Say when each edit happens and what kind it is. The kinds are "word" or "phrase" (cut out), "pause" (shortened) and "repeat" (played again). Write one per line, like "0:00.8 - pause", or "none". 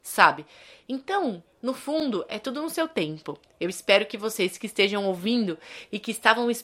none

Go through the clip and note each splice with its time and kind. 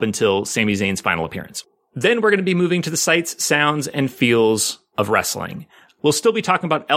none

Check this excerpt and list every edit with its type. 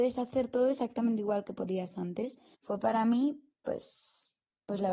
0:02.5 - pause

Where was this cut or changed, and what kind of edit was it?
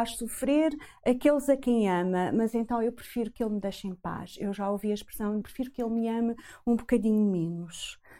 0:05.4 - phrase

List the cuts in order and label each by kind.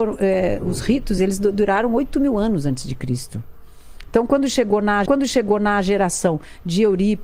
0:01.2 - phrase
0:05.1 - repeat

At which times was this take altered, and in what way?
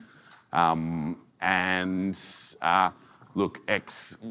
none

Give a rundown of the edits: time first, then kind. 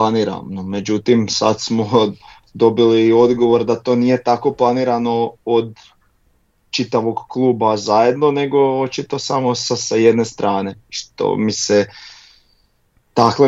none

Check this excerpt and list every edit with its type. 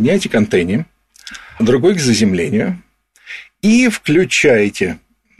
0:01.6 - word

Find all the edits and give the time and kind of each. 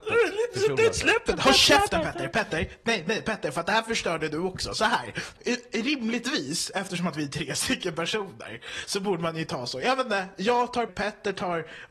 0:10.9 - word

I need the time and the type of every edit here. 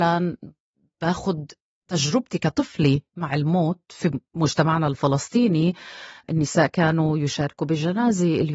none

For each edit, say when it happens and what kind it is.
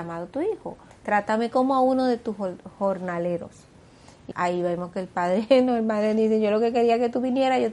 0:04.3 - word

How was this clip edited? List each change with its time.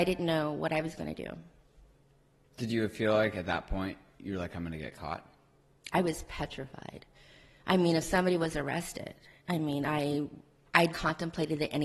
0:10.9 - word

